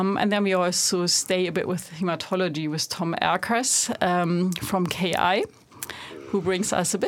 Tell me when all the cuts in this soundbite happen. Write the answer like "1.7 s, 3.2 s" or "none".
none